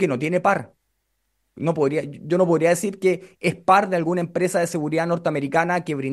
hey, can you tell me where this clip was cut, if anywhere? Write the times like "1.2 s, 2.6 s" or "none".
none